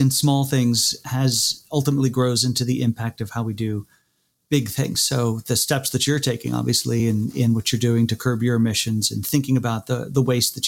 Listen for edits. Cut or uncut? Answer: uncut